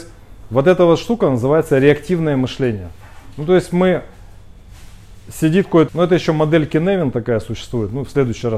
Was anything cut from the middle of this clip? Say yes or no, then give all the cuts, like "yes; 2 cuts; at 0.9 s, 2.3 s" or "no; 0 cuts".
yes; 1 cut; at 5.9 s